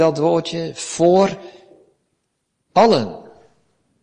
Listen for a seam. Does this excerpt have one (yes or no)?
no